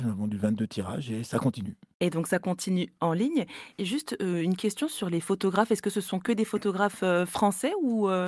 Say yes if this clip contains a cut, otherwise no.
no